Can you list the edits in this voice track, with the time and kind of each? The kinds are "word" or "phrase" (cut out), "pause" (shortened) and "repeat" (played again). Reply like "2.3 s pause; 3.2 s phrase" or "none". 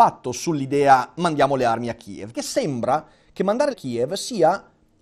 2.3 s word; 3.7 s phrase